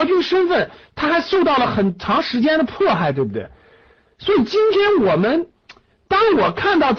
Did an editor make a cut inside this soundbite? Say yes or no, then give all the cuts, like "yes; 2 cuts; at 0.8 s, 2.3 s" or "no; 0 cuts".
no; 0 cuts